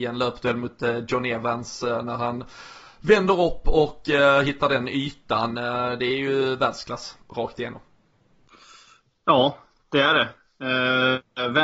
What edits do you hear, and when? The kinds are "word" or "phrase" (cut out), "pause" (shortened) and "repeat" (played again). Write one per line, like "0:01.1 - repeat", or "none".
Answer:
none